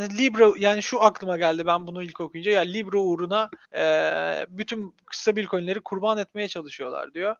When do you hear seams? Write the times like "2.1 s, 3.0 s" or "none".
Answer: 3.7 s